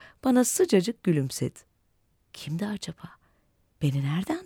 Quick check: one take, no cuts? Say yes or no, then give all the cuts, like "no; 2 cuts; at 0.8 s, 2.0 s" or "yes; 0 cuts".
yes; 0 cuts